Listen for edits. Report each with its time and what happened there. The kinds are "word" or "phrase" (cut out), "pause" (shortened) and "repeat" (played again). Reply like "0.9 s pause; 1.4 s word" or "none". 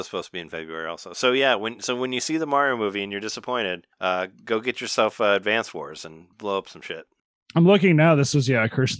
3.9 s pause; 6.3 s pause; 7.2 s pause